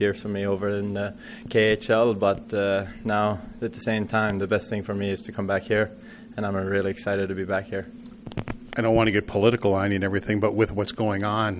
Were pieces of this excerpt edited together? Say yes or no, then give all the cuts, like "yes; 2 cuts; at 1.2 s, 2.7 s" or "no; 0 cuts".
no; 0 cuts